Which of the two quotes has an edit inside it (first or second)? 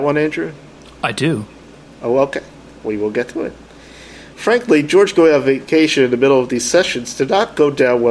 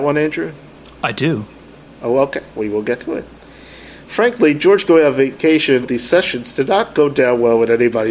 second